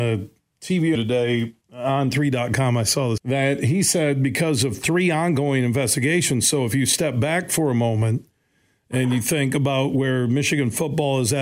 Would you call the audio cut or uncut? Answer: cut